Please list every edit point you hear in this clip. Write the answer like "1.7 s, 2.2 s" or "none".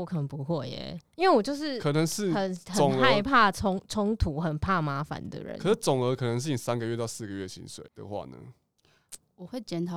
7.9 s